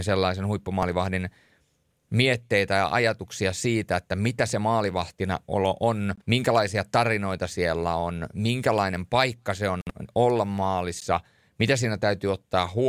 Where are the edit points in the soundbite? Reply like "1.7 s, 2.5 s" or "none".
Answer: 6.2 s